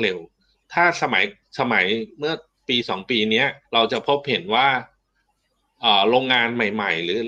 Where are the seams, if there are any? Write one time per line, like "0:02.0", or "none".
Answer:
0:03.6